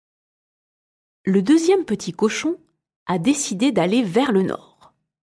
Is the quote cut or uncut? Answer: uncut